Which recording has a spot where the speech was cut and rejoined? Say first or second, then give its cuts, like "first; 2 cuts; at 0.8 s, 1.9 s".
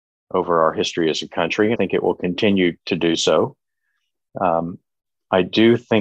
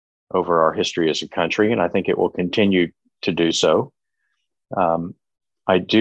first; 2 cuts; at 1.8 s, 2.8 s